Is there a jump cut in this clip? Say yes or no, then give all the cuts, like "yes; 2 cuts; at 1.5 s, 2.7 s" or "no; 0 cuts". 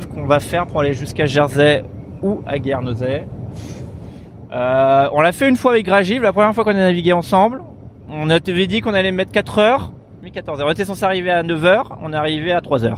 no; 0 cuts